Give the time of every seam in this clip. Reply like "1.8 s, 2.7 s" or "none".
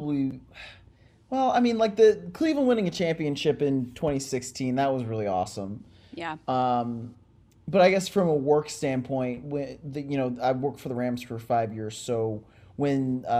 none